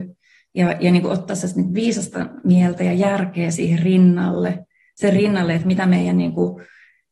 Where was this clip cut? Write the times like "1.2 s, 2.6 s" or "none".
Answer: none